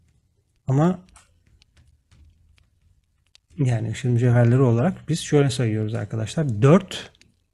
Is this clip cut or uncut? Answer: uncut